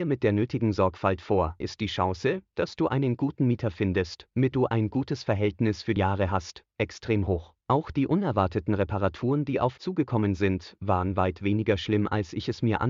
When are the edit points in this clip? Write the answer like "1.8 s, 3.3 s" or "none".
1.6 s, 4.5 s, 6.0 s, 7.6 s, 9.8 s